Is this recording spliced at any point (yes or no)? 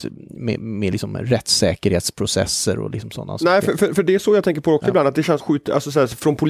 yes